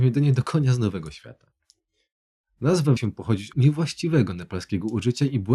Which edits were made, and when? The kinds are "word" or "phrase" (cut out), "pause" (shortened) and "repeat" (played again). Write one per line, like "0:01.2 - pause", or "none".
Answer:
0:03.0 - word
0:03.5 - word